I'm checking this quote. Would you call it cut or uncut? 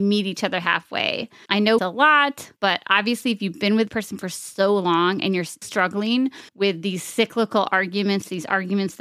cut